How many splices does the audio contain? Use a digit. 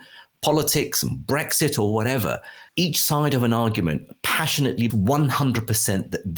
2